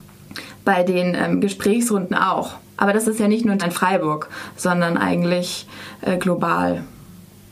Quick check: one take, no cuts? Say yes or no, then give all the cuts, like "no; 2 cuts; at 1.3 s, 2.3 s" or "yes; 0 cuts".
no; 1 cut; at 3.6 s